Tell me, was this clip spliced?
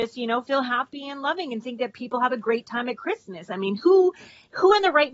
no; 0 cuts

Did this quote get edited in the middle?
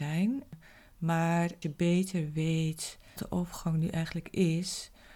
yes; 2 cuts; at 1.6 s, 3.2 s

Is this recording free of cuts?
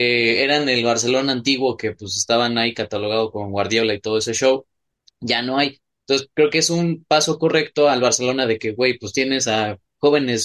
yes; 0 cuts

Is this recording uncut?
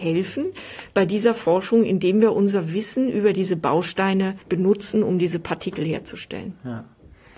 no; 1 cut; at 4.4 s

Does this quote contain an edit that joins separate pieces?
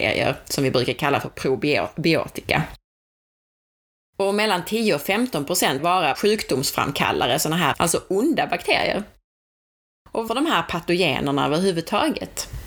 yes; 4 cuts; at 5.8 s, 6.1 s, 7.7 s, 10.3 s

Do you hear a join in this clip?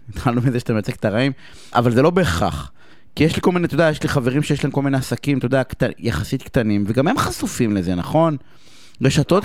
yes; 1 cut; at 1.7 s

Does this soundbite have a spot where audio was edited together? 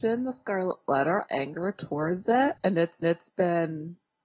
yes; 3 cuts; at 1.3 s, 2.6 s, 3.0 s

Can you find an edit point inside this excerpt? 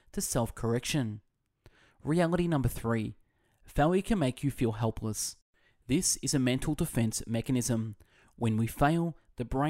no; 0 cuts

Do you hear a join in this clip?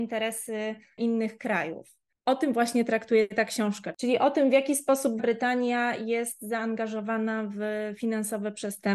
yes; 1 cut; at 5.2 s

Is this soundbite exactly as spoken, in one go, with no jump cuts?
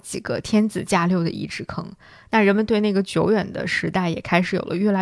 yes; 0 cuts

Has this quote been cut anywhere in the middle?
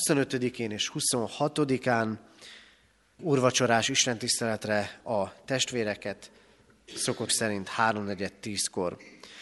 yes; 3 cuts; at 3.2 s, 5.0 s, 7.3 s

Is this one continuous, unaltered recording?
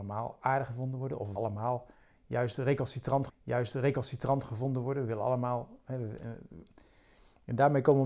no; 2 cuts; at 1.4 s, 3.3 s

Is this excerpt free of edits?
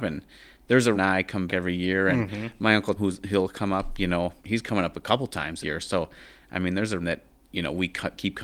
no; 6 cuts; at 0.9 s, 1.5 s, 3.0 s, 4.4 s, 5.6 s, 7.0 s

